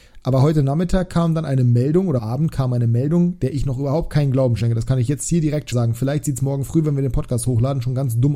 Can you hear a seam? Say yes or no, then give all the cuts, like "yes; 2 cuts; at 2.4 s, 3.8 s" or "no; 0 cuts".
yes; 2 cuts; at 2.2 s, 5.7 s